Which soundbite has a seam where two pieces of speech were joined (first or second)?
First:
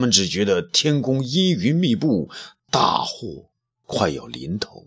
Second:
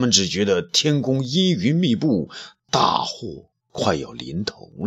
second